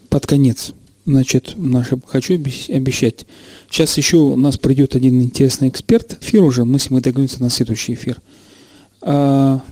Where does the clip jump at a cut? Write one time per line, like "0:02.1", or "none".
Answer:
0:02.0
0:04.6
0:06.2